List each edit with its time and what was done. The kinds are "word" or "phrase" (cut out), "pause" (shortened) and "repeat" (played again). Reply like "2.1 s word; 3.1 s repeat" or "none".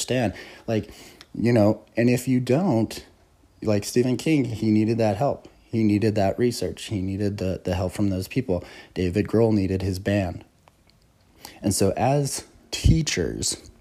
none